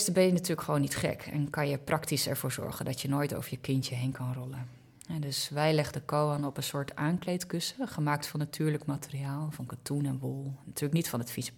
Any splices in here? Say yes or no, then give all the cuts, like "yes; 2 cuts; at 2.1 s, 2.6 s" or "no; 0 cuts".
no; 0 cuts